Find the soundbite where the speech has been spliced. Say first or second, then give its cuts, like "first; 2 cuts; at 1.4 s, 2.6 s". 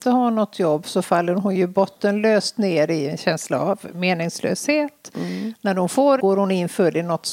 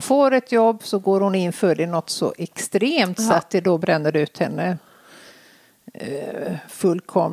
first; 1 cut; at 6.2 s